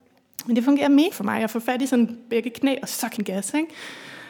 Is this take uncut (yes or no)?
no